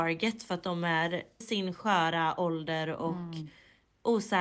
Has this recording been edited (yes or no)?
yes